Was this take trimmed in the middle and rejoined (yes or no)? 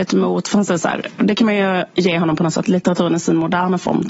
yes